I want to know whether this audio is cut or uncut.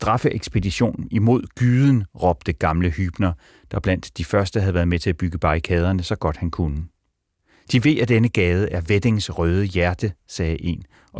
uncut